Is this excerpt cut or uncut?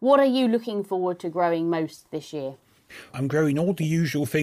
cut